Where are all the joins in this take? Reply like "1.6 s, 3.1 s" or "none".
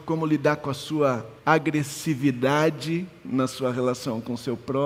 1.4 s